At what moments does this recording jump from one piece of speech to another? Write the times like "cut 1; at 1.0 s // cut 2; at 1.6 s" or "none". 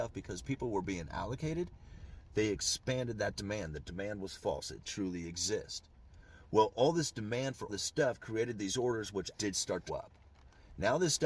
cut 1; at 4.8 s // cut 2; at 7.7 s // cut 3; at 9.3 s // cut 4; at 9.9 s